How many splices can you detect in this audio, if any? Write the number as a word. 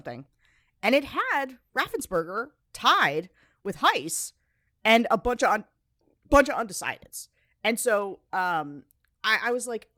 zero